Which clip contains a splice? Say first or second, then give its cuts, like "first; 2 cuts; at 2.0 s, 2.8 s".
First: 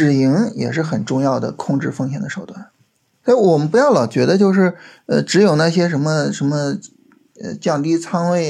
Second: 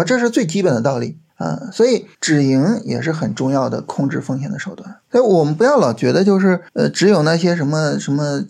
second; 4 cuts; at 1.3 s, 2.1 s, 5.0 s, 6.7 s